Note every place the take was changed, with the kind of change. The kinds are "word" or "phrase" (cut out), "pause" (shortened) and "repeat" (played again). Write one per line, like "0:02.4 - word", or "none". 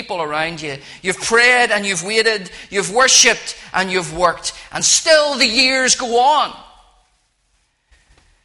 none